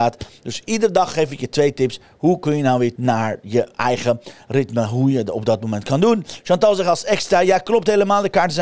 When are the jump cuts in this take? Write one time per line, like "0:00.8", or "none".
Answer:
0:03.0